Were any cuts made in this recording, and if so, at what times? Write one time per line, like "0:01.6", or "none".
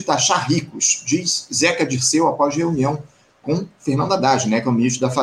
none